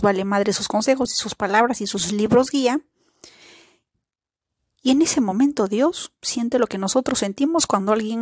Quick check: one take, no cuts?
yes; 0 cuts

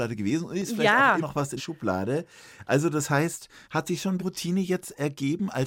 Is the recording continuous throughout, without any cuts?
no; 4 cuts; at 1.2 s, 1.6 s, 3.6 s, 4.2 s

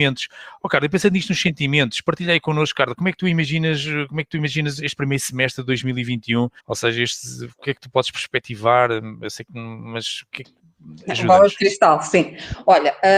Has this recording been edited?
yes; 1 cut; at 6.6 s

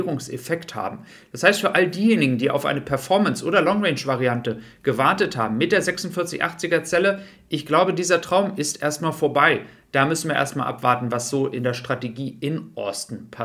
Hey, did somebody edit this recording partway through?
no; 0 cuts

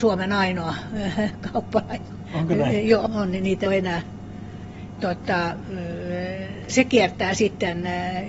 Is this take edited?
yes; 4 cuts; at 3.1 s, 3.7 s, 5.0 s, 6.7 s

